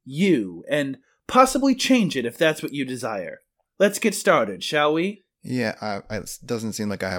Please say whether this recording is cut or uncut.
uncut